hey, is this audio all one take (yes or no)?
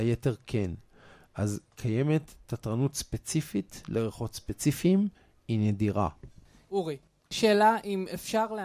yes